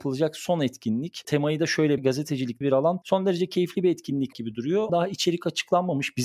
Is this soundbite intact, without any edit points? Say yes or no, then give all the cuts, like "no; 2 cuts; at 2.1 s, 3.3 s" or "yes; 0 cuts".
no; 5 cuts; at 2.0 s, 2.6 s, 3.0 s, 4.3 s, 4.9 s